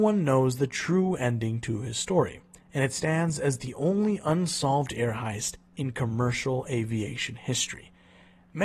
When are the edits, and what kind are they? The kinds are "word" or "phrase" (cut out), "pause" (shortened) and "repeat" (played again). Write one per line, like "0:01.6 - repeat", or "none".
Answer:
none